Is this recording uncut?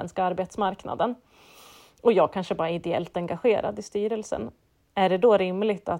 yes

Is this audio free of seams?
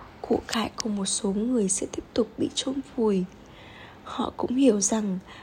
yes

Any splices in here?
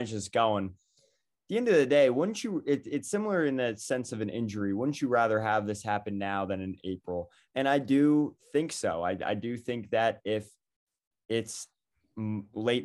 no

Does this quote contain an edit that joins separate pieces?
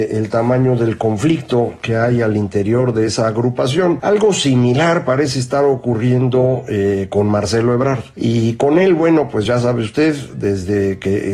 no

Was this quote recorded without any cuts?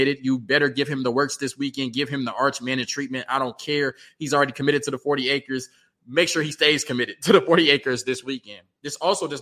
yes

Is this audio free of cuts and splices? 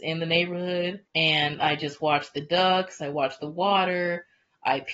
no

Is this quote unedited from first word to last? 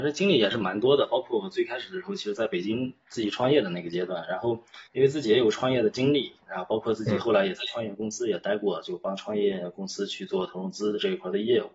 no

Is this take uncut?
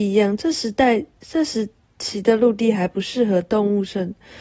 yes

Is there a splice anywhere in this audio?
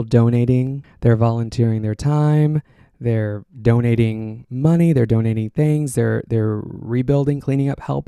no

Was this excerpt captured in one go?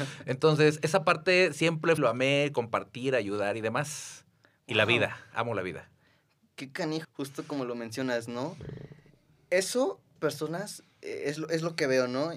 no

